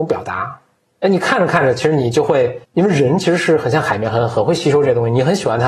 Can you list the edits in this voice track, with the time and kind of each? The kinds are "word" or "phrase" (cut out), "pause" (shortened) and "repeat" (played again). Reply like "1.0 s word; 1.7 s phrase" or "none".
2.6 s pause